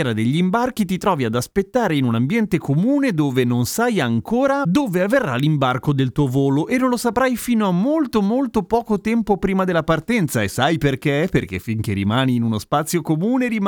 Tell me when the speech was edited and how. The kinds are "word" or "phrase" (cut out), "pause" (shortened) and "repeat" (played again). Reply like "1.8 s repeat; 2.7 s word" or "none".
none